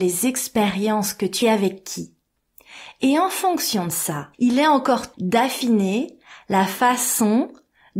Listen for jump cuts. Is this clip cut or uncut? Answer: cut